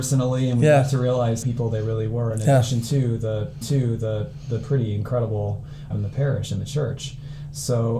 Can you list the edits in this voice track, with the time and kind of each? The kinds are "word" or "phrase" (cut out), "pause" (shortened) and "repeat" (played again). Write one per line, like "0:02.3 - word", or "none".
0:01.4 - phrase
0:03.6 - repeat
0:05.9 - phrase